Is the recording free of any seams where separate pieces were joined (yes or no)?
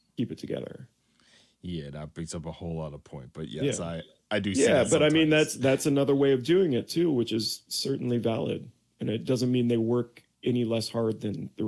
yes